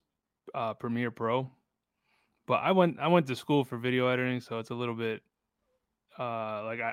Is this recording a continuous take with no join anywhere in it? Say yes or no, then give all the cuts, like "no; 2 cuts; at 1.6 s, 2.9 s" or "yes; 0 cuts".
yes; 0 cuts